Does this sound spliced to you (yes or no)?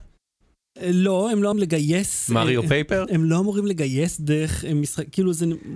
yes